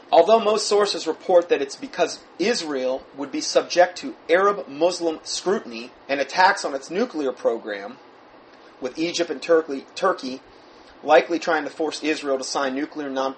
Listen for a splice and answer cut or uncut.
cut